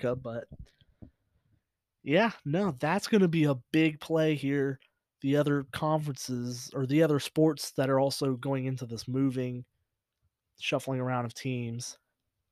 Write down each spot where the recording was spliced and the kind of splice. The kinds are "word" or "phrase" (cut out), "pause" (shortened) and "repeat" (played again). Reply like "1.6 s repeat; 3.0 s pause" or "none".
none